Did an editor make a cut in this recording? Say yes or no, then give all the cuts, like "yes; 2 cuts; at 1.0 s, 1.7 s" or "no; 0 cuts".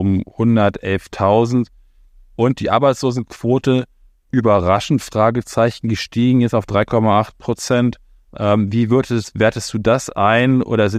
no; 0 cuts